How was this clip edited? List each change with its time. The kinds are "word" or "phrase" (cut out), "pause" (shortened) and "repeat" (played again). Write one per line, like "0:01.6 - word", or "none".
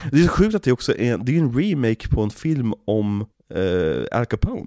0:03.3 - pause